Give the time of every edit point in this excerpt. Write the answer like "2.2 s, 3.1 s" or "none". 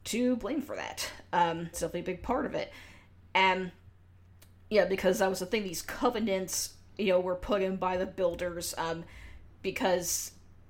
1.7 s